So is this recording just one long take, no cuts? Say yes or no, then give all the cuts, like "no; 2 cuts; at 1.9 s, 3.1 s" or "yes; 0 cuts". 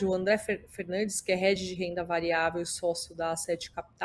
yes; 0 cuts